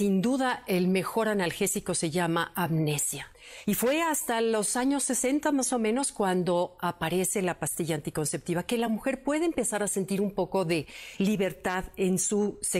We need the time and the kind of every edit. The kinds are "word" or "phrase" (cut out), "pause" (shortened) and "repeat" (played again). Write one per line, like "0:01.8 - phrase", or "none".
none